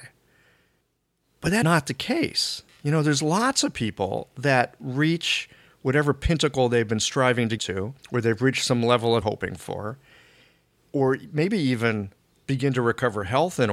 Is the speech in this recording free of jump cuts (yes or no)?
no